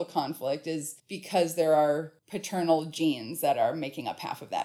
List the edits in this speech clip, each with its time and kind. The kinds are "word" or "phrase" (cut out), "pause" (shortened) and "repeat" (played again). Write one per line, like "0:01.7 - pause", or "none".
0:01.0 - pause
0:02.2 - pause